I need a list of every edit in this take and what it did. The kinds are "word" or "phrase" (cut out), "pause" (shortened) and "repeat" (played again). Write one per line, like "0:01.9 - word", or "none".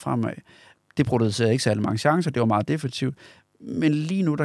none